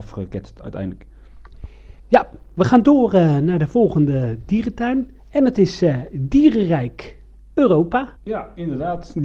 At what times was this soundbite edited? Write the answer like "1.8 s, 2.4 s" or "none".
2.0 s, 5.2 s, 8.2 s